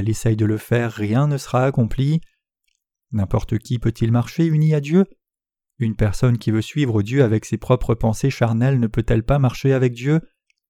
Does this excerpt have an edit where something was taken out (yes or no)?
no